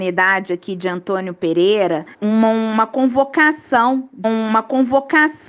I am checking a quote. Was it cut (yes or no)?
yes